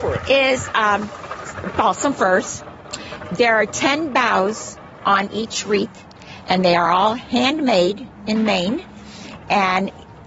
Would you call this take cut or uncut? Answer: uncut